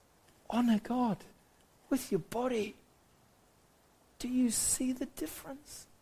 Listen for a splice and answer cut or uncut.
uncut